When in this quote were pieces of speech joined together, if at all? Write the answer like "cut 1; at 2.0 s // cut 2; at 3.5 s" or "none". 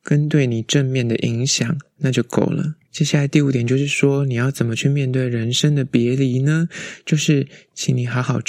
cut 1; at 2.9 s